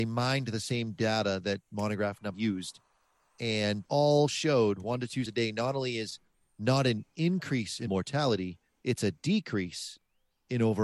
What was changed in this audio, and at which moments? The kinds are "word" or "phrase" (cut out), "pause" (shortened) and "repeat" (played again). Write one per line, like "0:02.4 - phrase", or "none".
0:02.3 - word
0:03.8 - word
0:05.3 - word
0:07.9 - word